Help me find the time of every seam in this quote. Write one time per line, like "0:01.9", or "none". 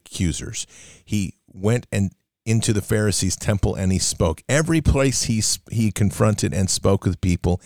none